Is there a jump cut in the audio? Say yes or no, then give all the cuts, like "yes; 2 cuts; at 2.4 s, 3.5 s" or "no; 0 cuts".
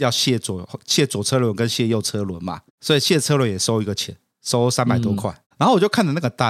no; 0 cuts